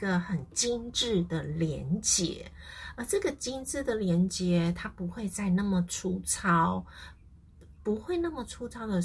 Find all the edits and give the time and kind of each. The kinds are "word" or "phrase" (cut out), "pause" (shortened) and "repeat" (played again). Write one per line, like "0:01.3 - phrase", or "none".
0:07.8 - word